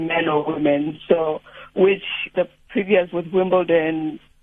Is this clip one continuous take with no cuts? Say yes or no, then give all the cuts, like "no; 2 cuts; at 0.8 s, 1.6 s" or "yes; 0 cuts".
no; 2 cuts; at 2.3 s, 3.1 s